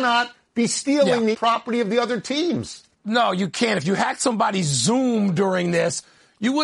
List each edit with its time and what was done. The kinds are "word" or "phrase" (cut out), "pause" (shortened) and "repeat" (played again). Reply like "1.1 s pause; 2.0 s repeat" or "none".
1.3 s word; 2.9 s pause